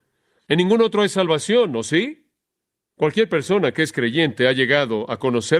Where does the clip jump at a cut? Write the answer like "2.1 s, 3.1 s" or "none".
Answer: none

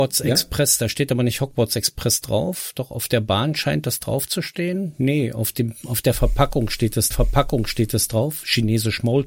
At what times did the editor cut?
7.1 s

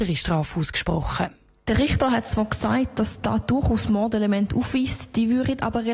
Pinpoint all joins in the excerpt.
none

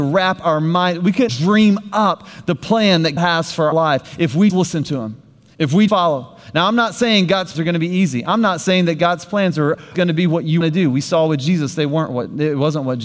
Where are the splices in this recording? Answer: 1.3 s, 3.2 s, 3.7 s, 4.5 s, 5.9 s, 7.5 s, 9.9 s, 10.6 s

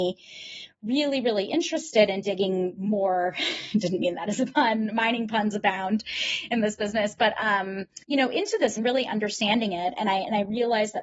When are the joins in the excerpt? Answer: 8.0 s, 8.8 s

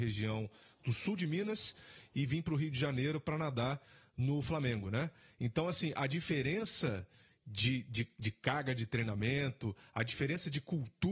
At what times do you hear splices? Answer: none

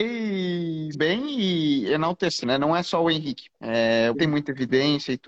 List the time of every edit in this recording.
0.9 s, 2.4 s, 3.5 s, 4.1 s

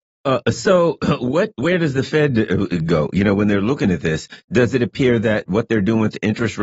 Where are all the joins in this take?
none

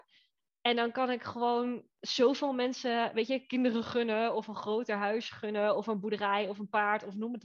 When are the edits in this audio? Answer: 1.9 s

